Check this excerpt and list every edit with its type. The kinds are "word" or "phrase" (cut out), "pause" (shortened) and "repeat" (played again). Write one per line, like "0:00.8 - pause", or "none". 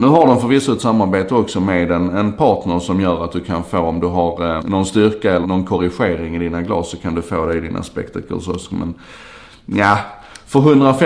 0:04.6 - word
0:05.4 - word